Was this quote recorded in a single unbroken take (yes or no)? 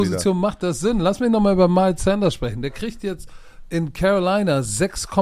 yes